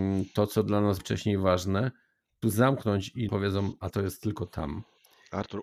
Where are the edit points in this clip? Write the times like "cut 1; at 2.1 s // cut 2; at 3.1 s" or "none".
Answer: cut 1; at 1.0 s // cut 2; at 2.4 s // cut 3; at 3.3 s // cut 4; at 3.9 s